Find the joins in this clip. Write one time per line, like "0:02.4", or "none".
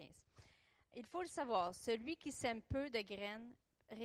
none